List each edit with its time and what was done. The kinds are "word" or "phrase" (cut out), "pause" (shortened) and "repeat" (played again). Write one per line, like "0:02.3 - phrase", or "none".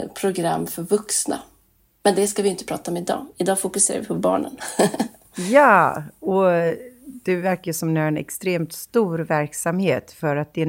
none